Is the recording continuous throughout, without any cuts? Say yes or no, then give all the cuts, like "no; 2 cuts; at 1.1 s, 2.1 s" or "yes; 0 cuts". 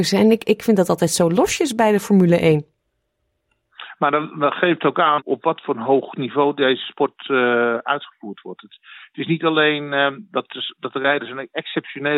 yes; 0 cuts